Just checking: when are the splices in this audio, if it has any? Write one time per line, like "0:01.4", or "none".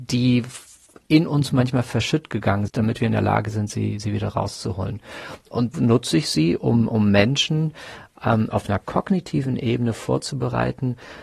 0:02.7
0:05.7

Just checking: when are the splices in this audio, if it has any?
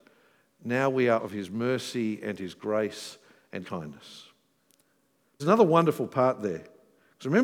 0:01.2
0:03.6
0:05.4

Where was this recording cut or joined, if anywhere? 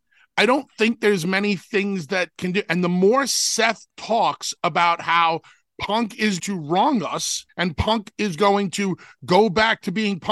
0:06.4
0:07.5

